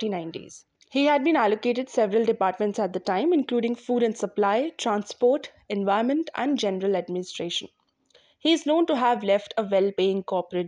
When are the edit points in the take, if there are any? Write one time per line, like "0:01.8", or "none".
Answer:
none